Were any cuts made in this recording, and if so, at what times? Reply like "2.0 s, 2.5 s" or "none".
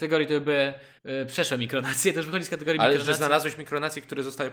1.0 s